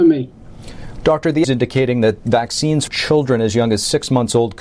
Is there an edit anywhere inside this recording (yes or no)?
yes